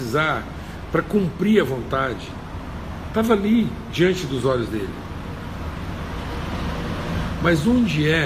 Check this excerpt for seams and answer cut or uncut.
uncut